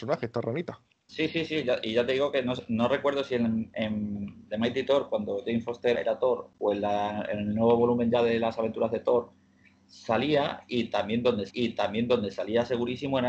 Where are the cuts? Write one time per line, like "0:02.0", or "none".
0:05.9
0:11.5